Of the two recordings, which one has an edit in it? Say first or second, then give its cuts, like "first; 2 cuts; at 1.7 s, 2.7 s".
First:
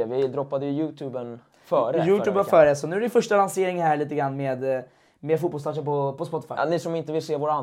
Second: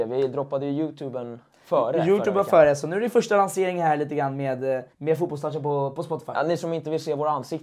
second; 1 cut; at 4.9 s